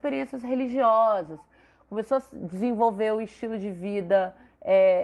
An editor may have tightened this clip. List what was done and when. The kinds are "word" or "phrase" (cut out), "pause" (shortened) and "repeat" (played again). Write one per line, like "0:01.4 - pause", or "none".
none

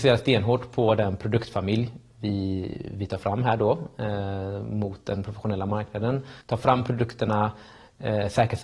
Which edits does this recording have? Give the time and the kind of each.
0:06.4 - pause

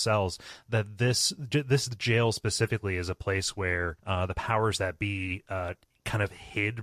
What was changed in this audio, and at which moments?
0:04.0 - pause

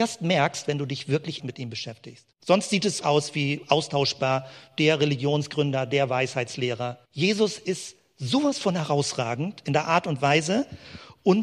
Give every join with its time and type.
0:01.4 - word
0:02.3 - pause
0:03.0 - word
0:07.1 - pause

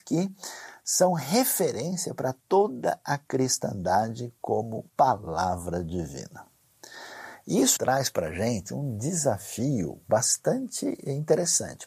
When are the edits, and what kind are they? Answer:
0:02.4 - pause
0:04.9 - pause
0:07.8 - word

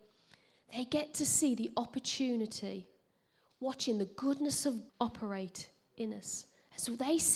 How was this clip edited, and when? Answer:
0:04.9 - word

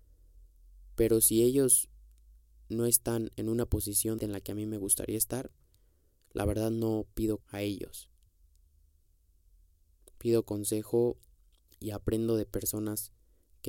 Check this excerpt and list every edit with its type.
0:07.4 - word

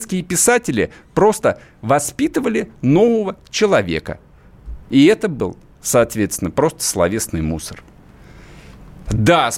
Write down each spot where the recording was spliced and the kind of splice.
0:04.8 - pause

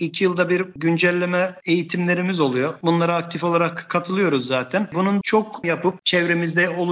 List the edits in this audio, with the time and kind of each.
0:05.2 - word
0:05.6 - word

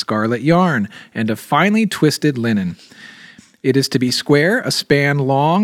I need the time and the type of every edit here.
none

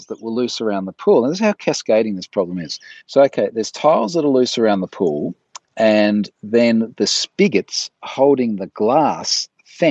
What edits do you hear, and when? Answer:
0:03.0 - pause

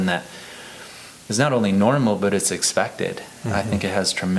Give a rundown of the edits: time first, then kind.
none

